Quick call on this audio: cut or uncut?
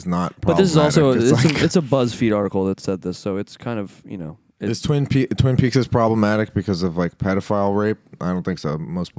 uncut